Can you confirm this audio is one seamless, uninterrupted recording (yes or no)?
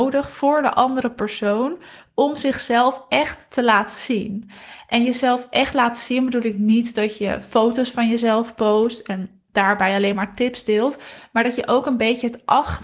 yes